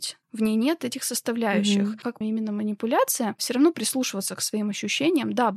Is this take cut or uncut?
cut